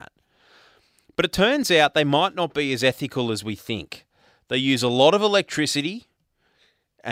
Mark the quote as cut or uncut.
uncut